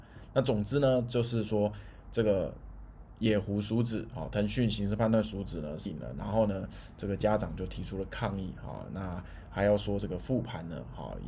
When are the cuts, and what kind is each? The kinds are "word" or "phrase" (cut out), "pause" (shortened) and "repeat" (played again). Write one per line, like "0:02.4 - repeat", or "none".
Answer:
0:05.9 - word

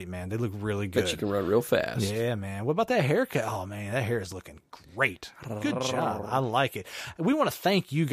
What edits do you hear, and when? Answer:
none

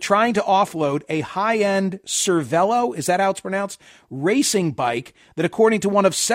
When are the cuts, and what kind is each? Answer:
none

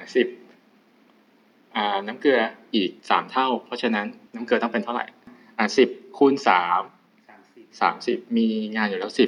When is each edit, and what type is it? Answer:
0:03.0 - pause
0:04.3 - pause

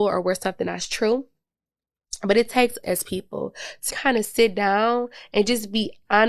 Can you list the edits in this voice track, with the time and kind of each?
0:02.8 - word
0:03.9 - word

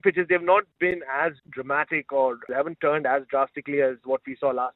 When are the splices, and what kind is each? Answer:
0:01.4 - pause
0:02.5 - word

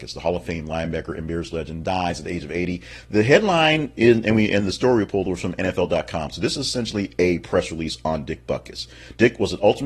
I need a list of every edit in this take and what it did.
none

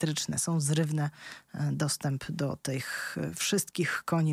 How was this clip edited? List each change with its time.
none

